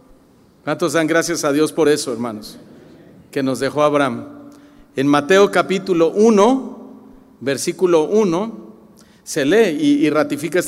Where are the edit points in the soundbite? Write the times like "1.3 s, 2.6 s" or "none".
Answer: none